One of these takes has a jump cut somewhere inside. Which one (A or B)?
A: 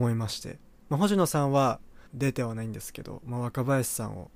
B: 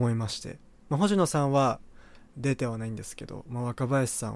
A